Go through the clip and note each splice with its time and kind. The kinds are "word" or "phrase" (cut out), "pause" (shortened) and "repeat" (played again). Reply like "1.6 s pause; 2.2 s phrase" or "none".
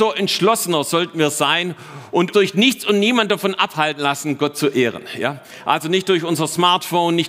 2.3 s word